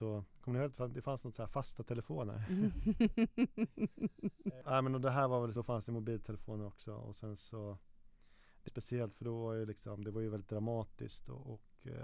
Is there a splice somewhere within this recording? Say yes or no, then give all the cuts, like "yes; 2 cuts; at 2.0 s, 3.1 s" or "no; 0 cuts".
yes; 2 cuts; at 5.6 s, 8.7 s